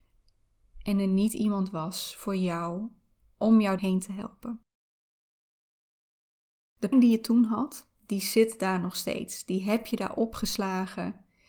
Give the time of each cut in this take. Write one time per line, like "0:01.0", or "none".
0:03.8
0:06.9
0:07.9